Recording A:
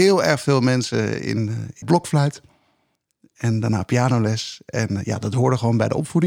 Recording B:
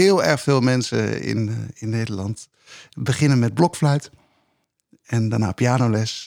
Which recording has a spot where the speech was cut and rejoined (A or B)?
A